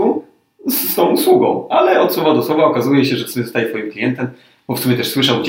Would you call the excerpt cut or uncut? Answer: uncut